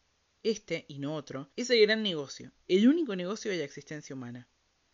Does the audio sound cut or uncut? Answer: cut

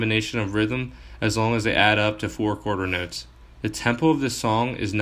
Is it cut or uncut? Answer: uncut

